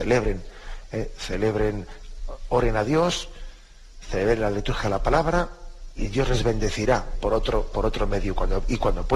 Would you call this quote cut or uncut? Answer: cut